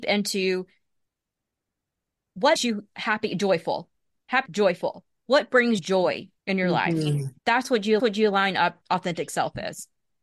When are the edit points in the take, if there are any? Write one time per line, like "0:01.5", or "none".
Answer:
0:02.6
0:04.5
0:05.8
0:06.4
0:07.4
0:08.0
0:08.8